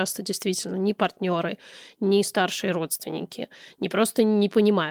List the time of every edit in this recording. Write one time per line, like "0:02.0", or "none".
none